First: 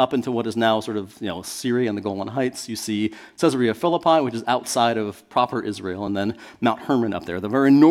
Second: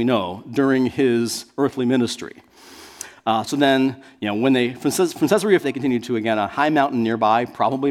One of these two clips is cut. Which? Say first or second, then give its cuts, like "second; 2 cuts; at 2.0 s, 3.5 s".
second; 1 cut; at 5.6 s